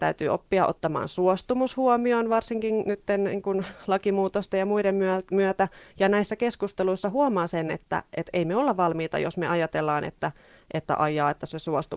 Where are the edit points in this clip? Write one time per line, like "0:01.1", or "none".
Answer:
none